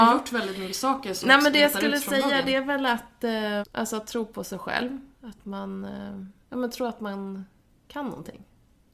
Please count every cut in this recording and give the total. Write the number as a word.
two